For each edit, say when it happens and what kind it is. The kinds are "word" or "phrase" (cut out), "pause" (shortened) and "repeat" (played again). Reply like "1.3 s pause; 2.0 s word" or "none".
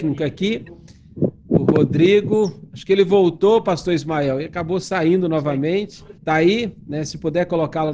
6.2 s pause